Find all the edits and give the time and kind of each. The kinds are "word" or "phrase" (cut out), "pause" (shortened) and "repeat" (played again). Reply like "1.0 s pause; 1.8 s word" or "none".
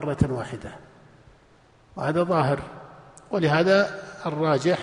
none